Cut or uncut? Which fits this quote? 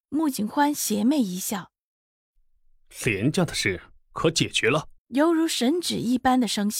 cut